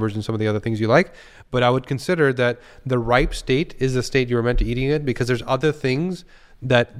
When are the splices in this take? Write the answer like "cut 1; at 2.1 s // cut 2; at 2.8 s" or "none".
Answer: none